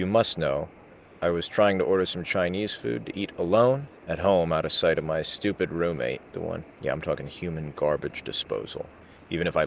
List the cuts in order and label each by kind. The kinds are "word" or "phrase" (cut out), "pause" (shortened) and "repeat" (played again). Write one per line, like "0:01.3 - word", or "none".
0:04.0 - pause
0:06.7 - pause